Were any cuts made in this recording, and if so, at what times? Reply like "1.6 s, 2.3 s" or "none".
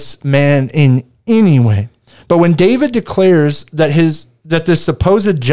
none